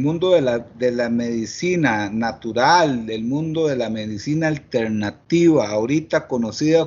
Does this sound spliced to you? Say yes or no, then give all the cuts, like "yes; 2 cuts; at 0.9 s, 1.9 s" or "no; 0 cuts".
no; 0 cuts